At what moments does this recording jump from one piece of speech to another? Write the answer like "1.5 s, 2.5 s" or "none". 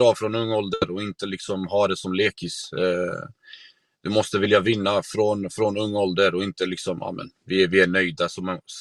none